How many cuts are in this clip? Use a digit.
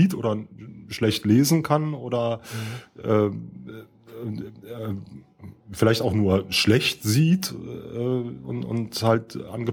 1